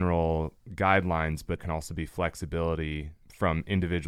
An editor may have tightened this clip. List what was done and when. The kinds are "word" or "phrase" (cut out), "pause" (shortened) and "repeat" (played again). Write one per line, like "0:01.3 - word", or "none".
0:01.6 - word